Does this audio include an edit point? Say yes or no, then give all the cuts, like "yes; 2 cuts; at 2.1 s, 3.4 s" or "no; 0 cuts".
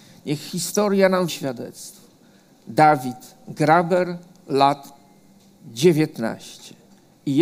yes; 1 cut; at 1.3 s